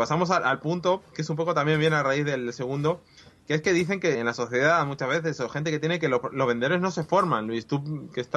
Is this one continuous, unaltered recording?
no; 1 cut; at 4.1 s

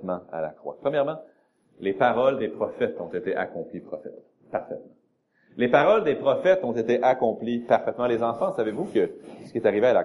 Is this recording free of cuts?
yes; 0 cuts

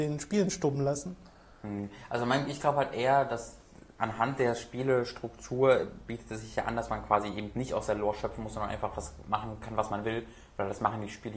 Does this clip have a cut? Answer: no; 0 cuts

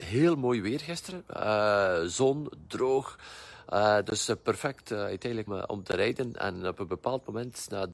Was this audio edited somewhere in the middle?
yes; 1 cut; at 5.5 s

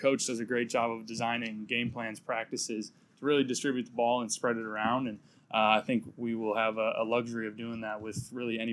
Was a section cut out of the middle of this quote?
no; 0 cuts

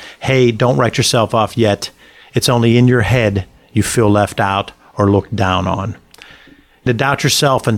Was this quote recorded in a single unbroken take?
no; 1 cut; at 6.9 s

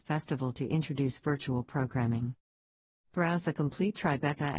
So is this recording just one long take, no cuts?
yes; 0 cuts

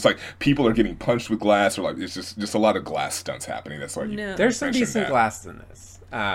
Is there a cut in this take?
yes; 1 cut; at 5.4 s

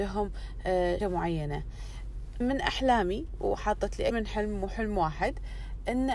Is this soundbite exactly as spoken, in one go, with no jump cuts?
no; 3 cuts; at 1.0 s, 2.4 s, 4.1 s

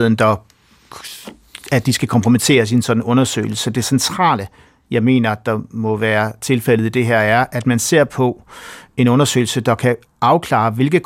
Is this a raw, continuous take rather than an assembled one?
yes; 0 cuts

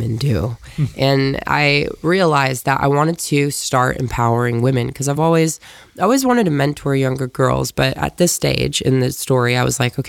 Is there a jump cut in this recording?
no; 0 cuts

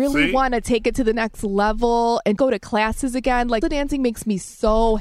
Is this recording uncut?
no; 2 cuts; at 2.4 s, 3.6 s

